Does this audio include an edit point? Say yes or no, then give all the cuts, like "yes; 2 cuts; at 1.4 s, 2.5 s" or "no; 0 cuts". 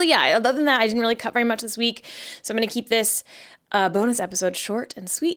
no; 0 cuts